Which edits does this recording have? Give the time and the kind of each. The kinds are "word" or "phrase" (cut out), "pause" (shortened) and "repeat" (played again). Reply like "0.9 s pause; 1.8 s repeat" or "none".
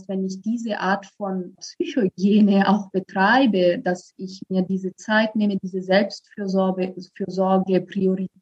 1.5 s word

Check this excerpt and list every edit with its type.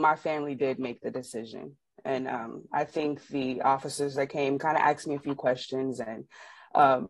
none

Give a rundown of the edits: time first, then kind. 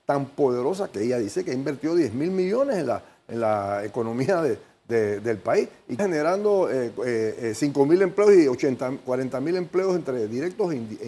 6.0 s word

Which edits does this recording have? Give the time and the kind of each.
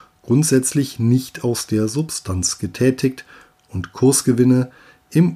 none

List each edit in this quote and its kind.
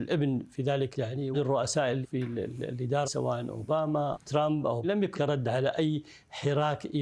0.9 s word; 1.3 s word; 2.0 s word; 3.0 s word; 4.1 s word; 4.8 s word; 5.1 s word

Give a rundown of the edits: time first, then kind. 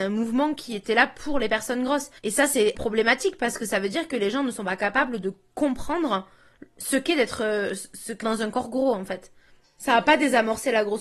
2.2 s pause; 2.7 s word; 8.2 s phrase

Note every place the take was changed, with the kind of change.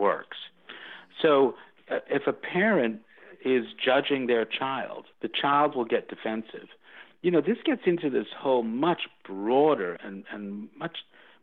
5.1 s pause; 10.0 s word

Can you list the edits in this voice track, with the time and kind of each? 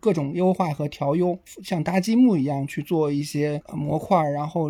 none

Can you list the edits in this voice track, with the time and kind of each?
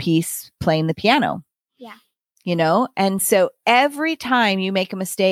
none

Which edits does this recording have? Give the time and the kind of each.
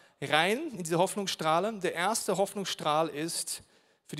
none

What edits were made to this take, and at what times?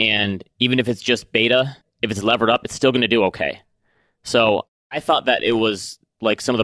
1.8 s pause

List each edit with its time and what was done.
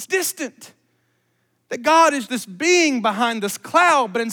2.3 s word

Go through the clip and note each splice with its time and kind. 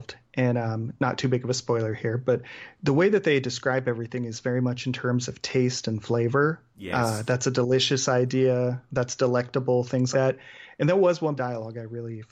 10.1 s word; 11.4 s phrase

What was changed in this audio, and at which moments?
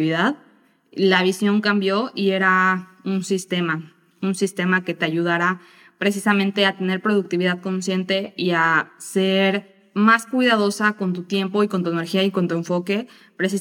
none

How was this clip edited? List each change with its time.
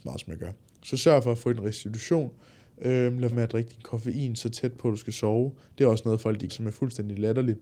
3.3 s word; 6.5 s word

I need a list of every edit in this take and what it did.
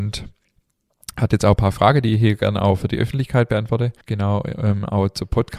4.0 s pause

